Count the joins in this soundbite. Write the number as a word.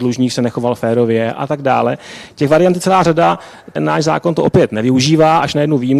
one